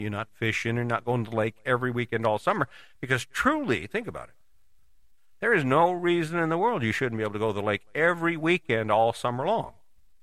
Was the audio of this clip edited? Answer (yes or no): no